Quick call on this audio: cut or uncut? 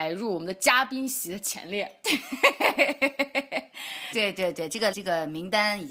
cut